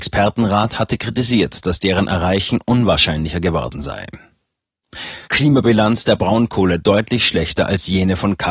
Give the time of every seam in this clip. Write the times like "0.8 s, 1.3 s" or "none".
5.3 s